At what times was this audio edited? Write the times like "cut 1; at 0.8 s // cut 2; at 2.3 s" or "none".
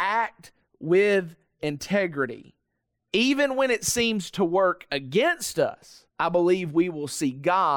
cut 1; at 6.1 s